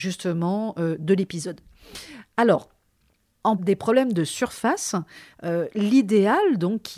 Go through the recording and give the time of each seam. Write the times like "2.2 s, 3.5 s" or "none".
3.6 s